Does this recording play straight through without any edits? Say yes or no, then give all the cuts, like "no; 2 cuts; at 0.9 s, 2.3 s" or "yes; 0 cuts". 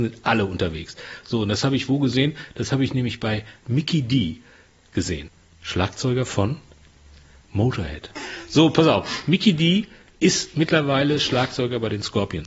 yes; 0 cuts